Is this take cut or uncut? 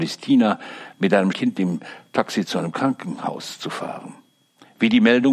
cut